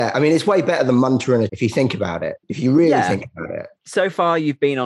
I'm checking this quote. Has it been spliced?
yes; 2 cuts; at 1.5 s, 2.4 s

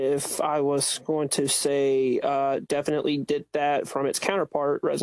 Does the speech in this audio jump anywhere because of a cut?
no; 0 cuts

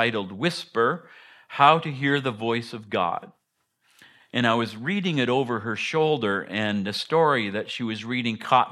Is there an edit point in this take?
no; 0 cuts

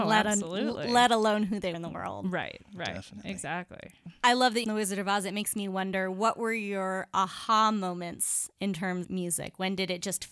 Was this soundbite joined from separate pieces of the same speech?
yes; 3 cuts; at 1.7 s, 4.6 s, 9.0 s

